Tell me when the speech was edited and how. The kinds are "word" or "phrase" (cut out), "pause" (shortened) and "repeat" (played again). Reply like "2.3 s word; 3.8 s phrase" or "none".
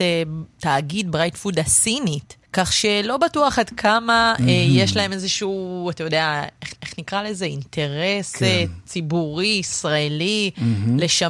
2.4 s pause; 6.8 s repeat